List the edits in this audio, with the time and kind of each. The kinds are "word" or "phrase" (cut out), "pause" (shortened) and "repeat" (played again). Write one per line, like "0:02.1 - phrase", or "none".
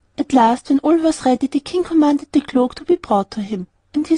none